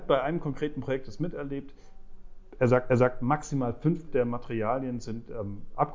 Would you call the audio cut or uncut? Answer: cut